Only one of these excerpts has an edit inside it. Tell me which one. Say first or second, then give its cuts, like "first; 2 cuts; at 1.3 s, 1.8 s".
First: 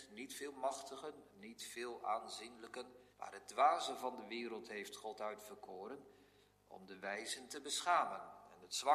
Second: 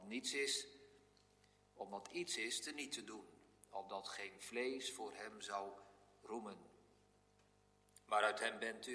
first; 1 cut; at 3.1 s